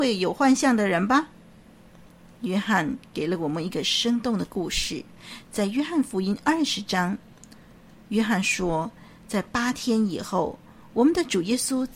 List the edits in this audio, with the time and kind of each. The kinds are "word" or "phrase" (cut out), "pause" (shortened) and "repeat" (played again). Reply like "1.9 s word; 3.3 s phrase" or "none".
none